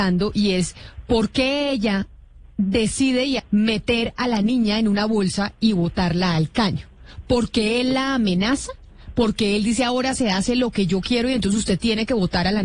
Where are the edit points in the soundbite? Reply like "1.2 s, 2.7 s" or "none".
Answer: 3.4 s